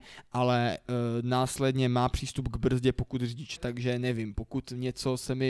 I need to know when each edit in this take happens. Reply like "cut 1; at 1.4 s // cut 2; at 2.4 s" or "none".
cut 1; at 3.6 s